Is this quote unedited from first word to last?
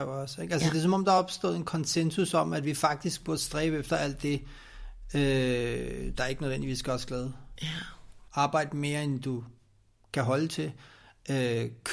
yes; 0 cuts

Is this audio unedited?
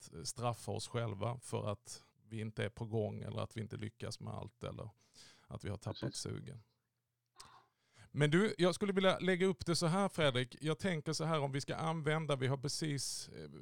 no; 1 cut; at 2.1 s

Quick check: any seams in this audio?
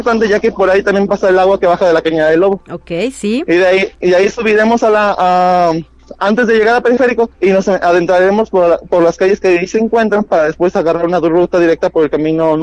yes; 1 cut; at 7.3 s

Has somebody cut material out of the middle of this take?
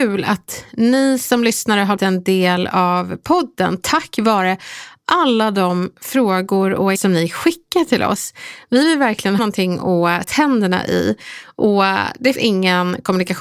yes; 5 cuts; at 2.0 s, 7.0 s, 9.4 s, 10.2 s, 12.4 s

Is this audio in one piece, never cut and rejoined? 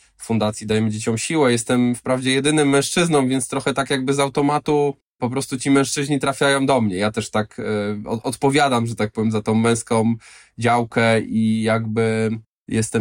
yes; 0 cuts

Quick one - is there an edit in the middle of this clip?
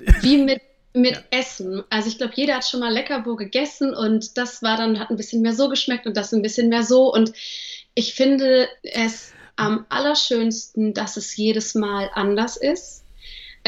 yes; 1 cut; at 8.8 s

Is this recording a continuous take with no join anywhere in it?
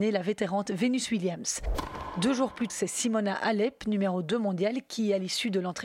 no; 1 cut; at 2.7 s

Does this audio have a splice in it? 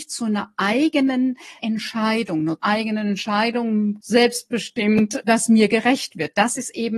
yes; 3 cuts; at 1.6 s, 2.6 s, 4.0 s

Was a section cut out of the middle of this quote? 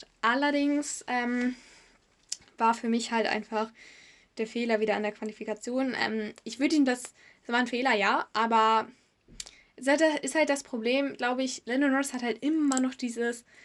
no; 0 cuts

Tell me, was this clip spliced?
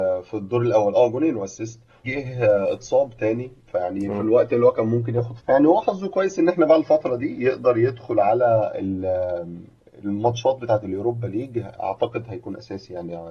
yes; 2 cuts; at 2.0 s, 5.4 s

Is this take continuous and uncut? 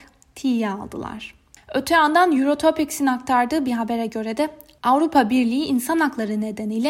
yes; 0 cuts

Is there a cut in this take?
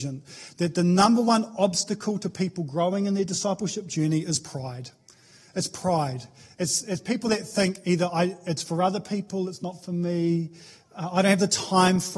no; 0 cuts

